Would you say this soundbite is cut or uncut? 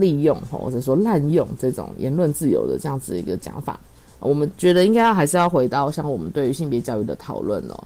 uncut